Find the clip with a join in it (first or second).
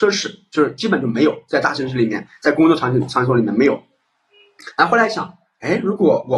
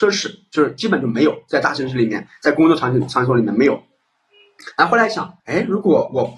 second